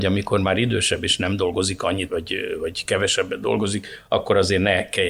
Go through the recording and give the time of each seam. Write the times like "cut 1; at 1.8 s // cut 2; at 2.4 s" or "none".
cut 1; at 2.1 s